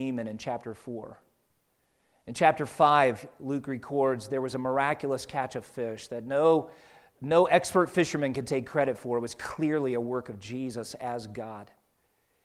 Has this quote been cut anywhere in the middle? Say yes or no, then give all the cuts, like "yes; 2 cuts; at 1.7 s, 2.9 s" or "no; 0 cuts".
no; 0 cuts